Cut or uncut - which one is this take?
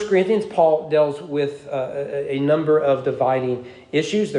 uncut